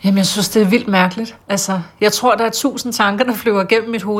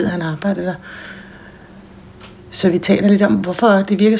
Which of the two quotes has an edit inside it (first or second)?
first